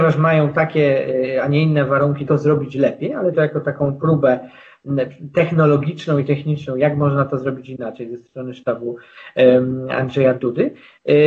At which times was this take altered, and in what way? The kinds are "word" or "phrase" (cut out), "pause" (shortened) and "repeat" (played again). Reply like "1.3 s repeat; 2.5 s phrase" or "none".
2.3 s phrase; 3.3 s phrase